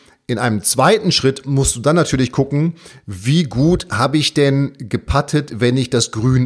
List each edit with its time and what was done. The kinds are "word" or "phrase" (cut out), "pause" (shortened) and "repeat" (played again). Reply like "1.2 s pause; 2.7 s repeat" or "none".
none